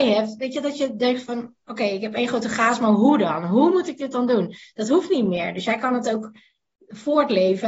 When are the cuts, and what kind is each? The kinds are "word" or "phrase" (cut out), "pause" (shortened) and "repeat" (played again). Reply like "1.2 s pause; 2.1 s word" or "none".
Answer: none